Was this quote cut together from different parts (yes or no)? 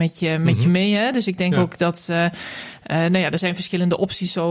no